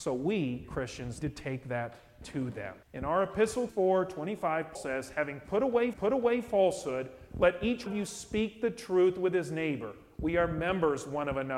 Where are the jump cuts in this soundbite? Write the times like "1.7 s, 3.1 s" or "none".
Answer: 1.2 s, 2.8 s, 3.7 s, 4.7 s, 5.9 s, 7.9 s